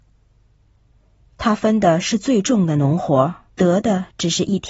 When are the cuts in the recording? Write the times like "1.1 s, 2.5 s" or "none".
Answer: 3.5 s